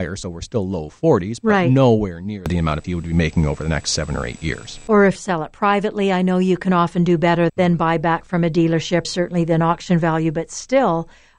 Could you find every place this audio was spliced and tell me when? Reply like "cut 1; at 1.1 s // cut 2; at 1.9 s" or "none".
cut 1; at 2.8 s // cut 2; at 5.2 s // cut 3; at 7.5 s // cut 4; at 9.0 s